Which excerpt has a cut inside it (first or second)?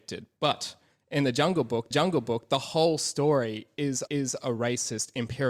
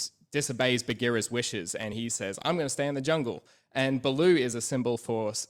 first